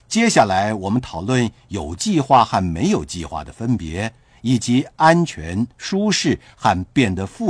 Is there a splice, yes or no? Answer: no